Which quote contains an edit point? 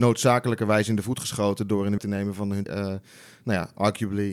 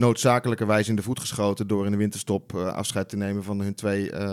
first; 2 cuts; at 2.0 s, 2.7 s

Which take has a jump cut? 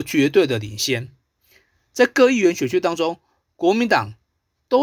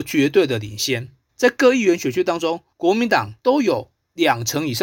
second; 3 cuts; at 1.3 s, 2.7 s, 3.4 s

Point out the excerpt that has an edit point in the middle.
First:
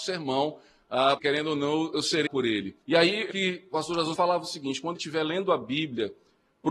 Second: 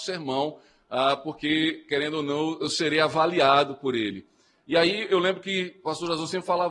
first; 6 cuts; at 1.2 s, 2.3 s, 2.8 s, 3.3 s, 4.1 s, 5.0 s

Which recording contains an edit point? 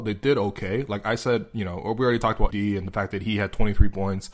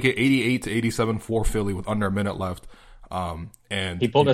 first; 1 cut; at 2.5 s

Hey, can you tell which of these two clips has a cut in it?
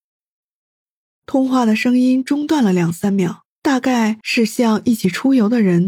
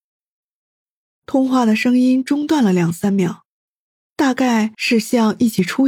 first; 1 cut; at 3.5 s

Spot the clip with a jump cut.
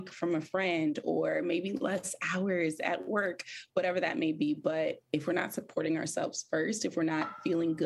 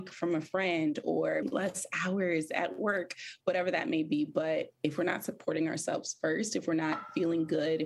second; 1 cut; at 1.4 s

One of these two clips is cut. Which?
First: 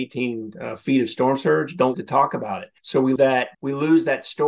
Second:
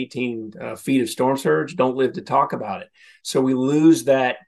first; 4 cuts; at 1.9 s, 2.8 s, 3.2 s, 3.5 s

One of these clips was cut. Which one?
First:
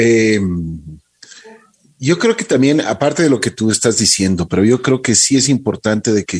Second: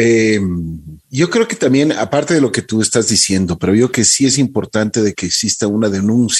second; 2 cuts; at 1.0 s, 3.9 s

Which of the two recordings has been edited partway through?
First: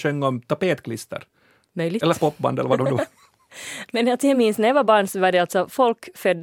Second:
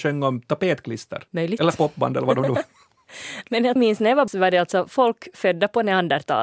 second; 3 cuts; at 1.3 s, 3.8 s, 4.3 s

